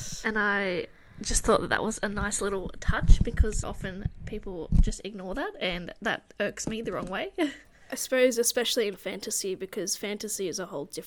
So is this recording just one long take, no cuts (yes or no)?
no